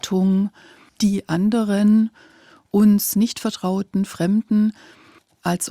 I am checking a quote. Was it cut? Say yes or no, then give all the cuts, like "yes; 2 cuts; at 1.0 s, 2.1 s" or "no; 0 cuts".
no; 0 cuts